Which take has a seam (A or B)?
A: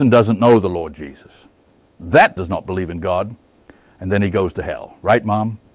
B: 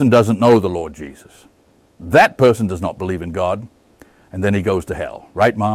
A